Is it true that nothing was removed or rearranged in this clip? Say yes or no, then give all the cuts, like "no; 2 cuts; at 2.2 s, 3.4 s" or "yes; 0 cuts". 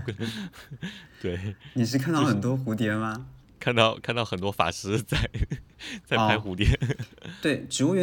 no; 1 cut; at 3.4 s